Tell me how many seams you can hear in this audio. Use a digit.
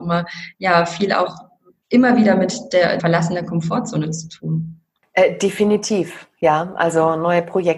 1